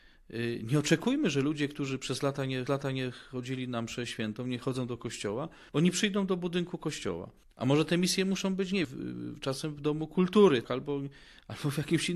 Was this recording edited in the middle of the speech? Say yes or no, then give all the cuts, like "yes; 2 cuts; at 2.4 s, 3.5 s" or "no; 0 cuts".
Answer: yes; 5 cuts; at 2.7 s, 5.7 s, 7.4 s, 8.8 s, 10.6 s